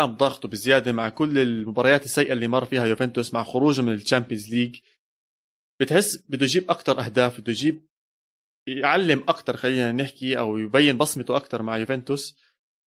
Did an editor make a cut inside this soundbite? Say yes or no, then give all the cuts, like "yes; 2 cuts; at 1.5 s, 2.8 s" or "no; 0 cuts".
no; 0 cuts